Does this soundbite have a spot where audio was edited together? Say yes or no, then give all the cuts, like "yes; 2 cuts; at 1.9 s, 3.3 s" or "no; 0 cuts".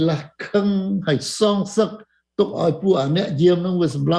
no; 0 cuts